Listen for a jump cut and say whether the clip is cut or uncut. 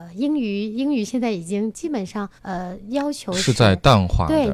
cut